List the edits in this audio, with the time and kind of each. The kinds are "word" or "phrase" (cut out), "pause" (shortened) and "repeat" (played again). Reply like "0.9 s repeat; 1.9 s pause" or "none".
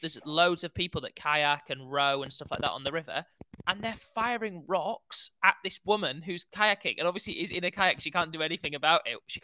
none